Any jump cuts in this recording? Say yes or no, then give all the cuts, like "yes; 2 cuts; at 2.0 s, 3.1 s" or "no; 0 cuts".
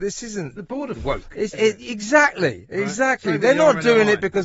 yes; 2 cuts; at 1.0 s, 1.5 s